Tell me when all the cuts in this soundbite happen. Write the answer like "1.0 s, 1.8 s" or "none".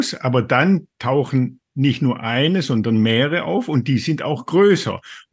none